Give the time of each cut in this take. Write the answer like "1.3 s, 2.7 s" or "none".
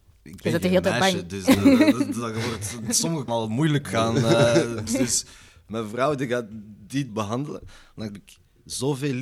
3.3 s, 4.9 s, 7.1 s, 8.1 s